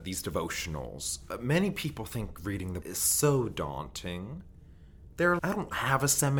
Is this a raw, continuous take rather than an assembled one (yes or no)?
no